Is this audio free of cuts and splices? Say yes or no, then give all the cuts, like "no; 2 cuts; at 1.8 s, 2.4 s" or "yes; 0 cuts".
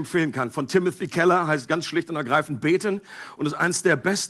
yes; 0 cuts